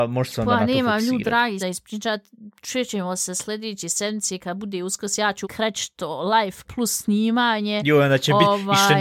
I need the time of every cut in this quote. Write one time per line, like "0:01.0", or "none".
0:01.6
0:05.4
0:06.6

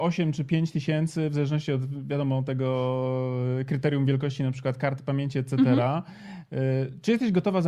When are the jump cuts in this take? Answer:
none

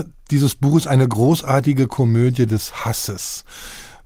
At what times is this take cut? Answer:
none

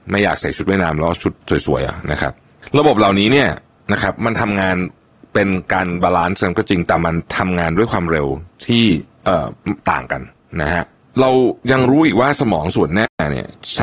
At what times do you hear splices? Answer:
none

